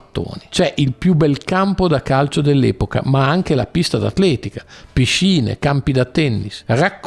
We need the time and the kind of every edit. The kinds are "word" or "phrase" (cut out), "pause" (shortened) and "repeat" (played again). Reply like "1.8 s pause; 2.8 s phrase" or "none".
none